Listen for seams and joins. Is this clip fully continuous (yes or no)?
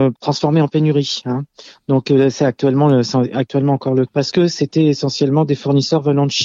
no